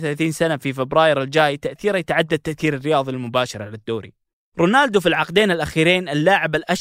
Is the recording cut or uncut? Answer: uncut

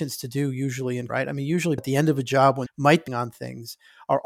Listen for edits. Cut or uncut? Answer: cut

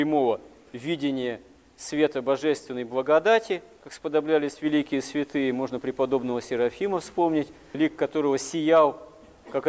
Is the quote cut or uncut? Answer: cut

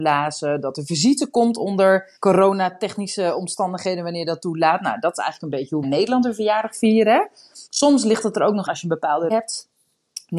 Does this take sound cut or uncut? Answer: cut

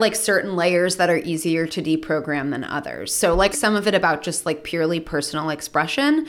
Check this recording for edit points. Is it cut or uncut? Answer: cut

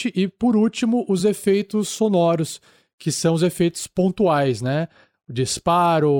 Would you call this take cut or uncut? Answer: uncut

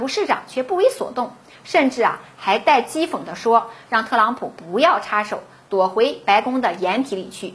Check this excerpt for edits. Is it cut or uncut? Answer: uncut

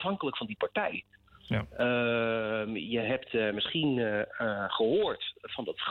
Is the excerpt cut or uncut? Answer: uncut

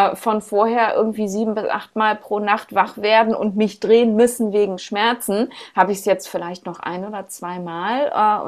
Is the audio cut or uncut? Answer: uncut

